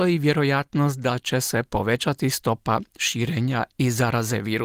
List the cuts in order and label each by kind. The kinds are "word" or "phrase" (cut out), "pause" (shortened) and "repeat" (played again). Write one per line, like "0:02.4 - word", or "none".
none